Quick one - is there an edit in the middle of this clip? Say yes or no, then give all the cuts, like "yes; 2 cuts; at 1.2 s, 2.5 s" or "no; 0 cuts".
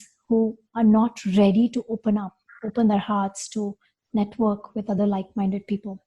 no; 0 cuts